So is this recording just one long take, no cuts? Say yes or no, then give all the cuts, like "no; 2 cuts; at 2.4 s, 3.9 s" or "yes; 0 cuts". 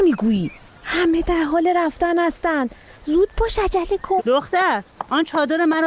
no; 1 cut; at 4.2 s